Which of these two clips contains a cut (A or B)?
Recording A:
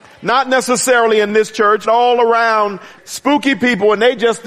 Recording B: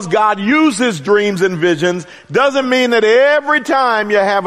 A